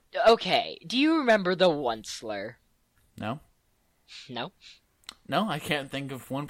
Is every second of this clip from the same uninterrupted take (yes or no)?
no